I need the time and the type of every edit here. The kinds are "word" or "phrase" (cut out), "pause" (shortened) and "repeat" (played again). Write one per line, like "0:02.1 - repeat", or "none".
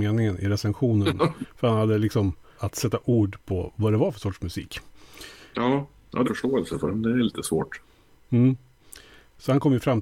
0:02.6 - word
0:06.2 - phrase

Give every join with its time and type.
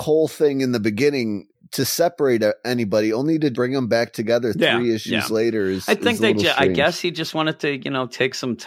0:03.5 - word

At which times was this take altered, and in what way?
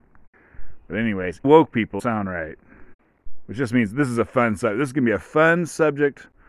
0:01.4 - word
0:02.0 - phrase

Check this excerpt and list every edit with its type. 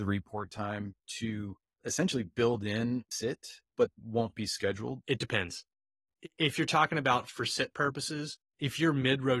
0:03.1 - word
0:03.9 - word
0:08.5 - pause

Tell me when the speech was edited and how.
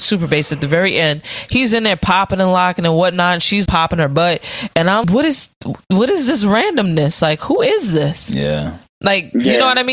0:03.7 - word
0:05.0 - word

